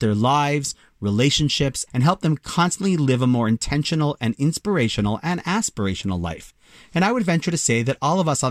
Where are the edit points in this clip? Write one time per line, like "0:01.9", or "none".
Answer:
0:01.9